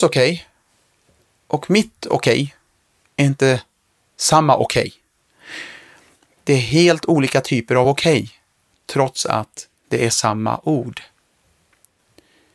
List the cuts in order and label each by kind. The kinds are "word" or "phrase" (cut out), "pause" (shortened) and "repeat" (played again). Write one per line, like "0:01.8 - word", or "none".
none

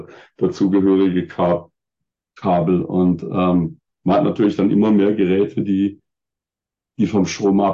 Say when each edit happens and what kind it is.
0:03.9 - pause

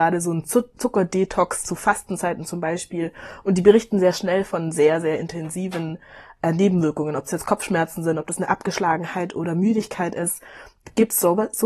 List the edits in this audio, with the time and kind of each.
none

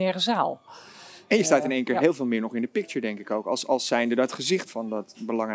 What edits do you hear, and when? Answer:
0:04.7 - word

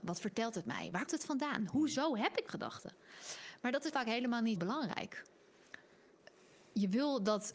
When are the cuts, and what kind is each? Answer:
0:01.1 - word
0:02.5 - word
0:03.9 - word
0:04.6 - word

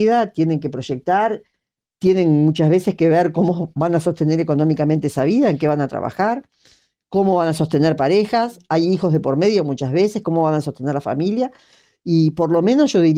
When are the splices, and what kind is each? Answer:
none

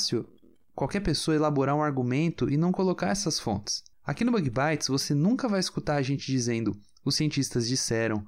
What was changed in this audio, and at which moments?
0:03.9 - pause

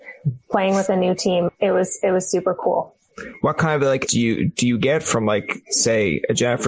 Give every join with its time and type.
0:04.1 - word

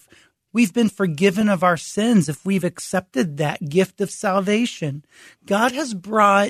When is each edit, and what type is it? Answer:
none

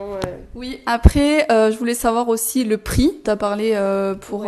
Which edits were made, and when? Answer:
0:03.2 - word

